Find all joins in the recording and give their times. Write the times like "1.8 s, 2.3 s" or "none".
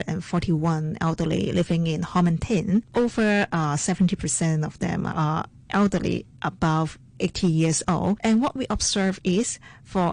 none

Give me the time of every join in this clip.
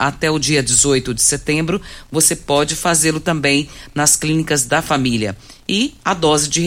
none

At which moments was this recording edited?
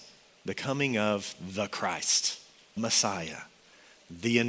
2.8 s

